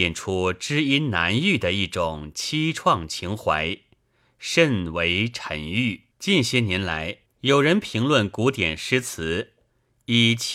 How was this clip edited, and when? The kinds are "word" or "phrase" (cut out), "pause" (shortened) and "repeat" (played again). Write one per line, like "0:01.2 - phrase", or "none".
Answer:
0:06.1 - pause
0:07.3 - pause

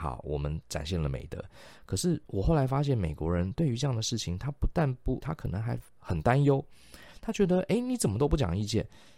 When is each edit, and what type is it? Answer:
0:05.2 - word
0:05.9 - pause

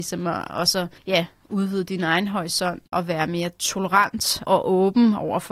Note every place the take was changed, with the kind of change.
0:01.0 - pause
0:02.9 - word
0:04.4 - word

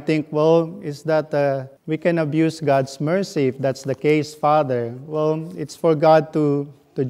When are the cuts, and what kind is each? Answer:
0:01.8 - pause

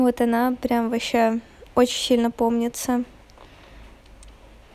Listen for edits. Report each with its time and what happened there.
0:01.7 - pause

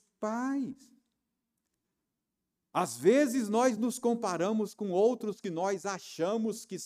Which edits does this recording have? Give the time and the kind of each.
none

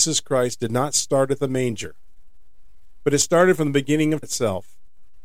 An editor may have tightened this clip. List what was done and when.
0:04.2 - word

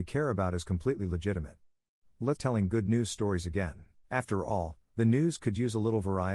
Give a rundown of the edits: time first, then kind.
0:02.4 - word
0:04.0 - pause

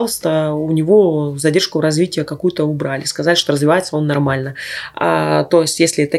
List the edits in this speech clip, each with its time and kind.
none

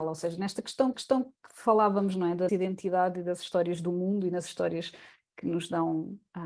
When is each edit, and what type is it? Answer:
0:00.9 - repeat
0:02.5 - word

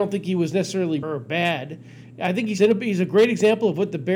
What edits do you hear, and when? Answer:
0:01.0 - word
0:02.6 - word

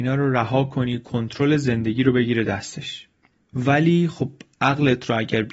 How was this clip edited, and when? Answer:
none

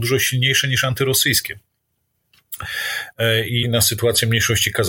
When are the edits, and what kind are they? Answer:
0:03.6 - phrase

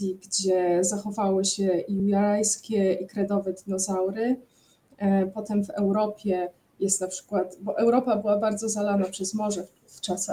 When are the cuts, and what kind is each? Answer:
none

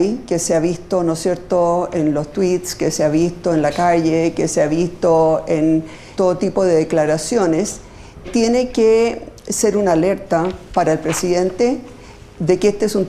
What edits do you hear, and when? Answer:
0:06.2 - word
0:08.2 - word

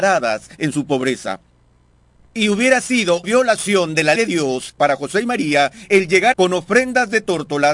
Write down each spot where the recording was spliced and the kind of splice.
0:03.2 - word
0:04.1 - word
0:04.8 - word
0:06.3 - word

